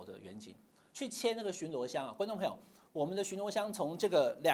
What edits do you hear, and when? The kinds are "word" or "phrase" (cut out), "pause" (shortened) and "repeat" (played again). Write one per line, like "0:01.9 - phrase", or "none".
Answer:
none